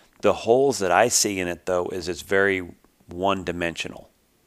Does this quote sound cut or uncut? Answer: uncut